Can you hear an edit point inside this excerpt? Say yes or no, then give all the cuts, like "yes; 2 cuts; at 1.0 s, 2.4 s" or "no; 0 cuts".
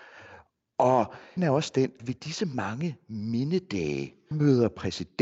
yes; 3 cuts; at 1.4 s, 2.0 s, 4.3 s